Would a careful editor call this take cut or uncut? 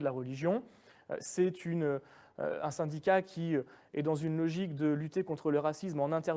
uncut